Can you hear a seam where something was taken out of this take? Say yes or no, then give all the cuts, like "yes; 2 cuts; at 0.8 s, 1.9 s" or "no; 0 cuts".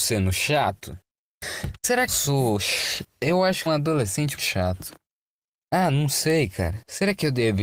yes; 4 cuts; at 2.1 s, 3.7 s, 4.4 s, 5.3 s